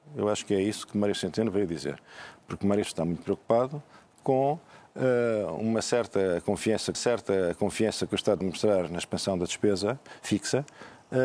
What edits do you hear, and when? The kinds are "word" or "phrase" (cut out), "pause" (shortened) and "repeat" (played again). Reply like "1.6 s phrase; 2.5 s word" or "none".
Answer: 2.8 s word; 6.9 s repeat; 8.4 s word